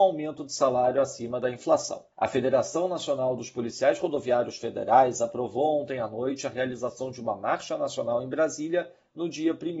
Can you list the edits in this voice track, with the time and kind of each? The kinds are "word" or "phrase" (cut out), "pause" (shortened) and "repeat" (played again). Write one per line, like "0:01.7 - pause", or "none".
0:02.1 - pause